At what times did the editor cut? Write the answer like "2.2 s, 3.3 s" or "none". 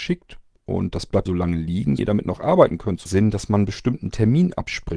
1.3 s, 2.0 s, 3.1 s